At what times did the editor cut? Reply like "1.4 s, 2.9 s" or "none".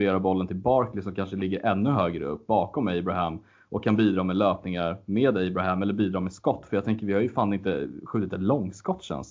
none